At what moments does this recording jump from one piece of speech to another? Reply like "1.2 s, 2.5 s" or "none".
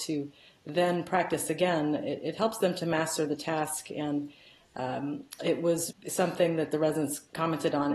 5.9 s